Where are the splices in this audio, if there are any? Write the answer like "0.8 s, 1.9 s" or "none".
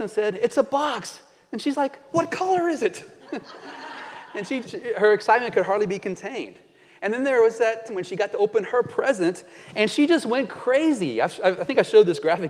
4.6 s, 7.9 s